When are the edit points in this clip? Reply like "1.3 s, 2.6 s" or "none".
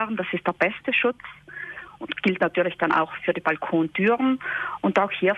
none